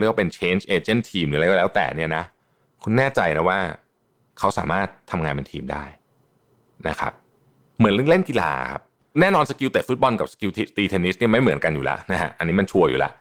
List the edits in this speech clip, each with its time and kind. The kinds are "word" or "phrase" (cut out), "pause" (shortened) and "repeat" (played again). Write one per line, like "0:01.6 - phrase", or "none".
none